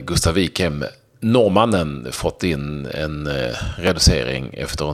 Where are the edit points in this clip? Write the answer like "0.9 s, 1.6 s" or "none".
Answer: none